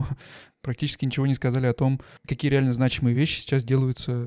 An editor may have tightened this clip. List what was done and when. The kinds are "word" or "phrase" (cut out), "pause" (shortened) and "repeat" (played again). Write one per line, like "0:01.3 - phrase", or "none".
none